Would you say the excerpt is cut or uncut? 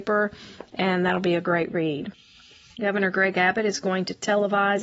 uncut